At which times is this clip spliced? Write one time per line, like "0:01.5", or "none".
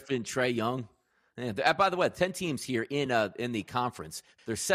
none